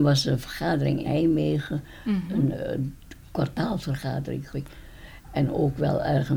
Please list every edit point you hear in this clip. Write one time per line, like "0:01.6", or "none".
0:01.0
0:02.5
0:04.5